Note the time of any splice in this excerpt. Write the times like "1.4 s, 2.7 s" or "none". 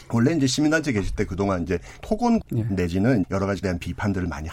2.0 s, 2.4 s, 3.2 s, 3.6 s